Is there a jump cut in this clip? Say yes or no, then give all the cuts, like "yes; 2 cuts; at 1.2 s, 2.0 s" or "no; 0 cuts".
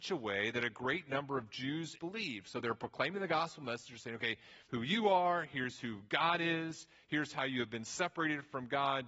yes; 2 cuts; at 2.0 s, 4.6 s